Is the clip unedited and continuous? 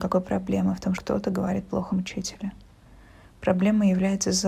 no; 2 cuts; at 1.0 s, 1.9 s

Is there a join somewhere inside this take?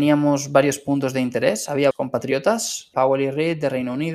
yes; 2 cuts; at 1.9 s, 2.9 s

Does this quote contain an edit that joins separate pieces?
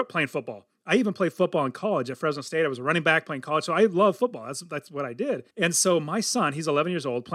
yes; 1 cut; at 5.5 s

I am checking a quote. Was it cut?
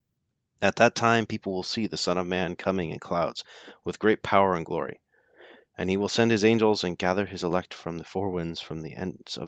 no; 0 cuts

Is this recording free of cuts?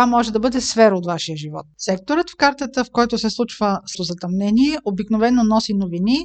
no; 1 cut; at 3.9 s

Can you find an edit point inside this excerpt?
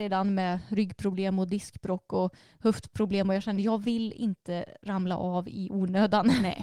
no; 0 cuts

